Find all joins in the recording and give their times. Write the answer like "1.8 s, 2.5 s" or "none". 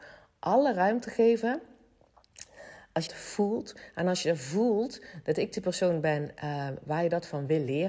3.1 s